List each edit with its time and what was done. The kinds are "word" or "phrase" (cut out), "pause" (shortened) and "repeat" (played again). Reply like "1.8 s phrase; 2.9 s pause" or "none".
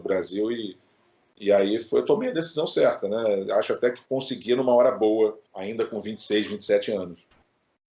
4.0 s pause; 5.5 s pause